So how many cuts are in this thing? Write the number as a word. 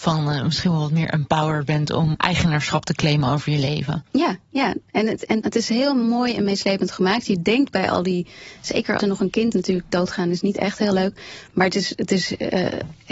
four